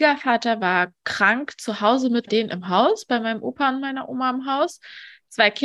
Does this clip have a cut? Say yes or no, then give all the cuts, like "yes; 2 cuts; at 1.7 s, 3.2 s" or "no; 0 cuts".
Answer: yes; 1 cut; at 2.3 s